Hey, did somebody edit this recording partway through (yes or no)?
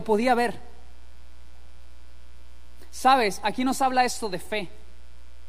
no